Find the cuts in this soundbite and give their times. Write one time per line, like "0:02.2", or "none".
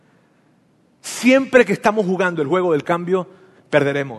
none